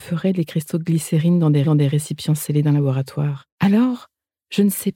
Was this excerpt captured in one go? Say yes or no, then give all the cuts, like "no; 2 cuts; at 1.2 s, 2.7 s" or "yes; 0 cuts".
no; 2 cuts; at 1.6 s, 3.5 s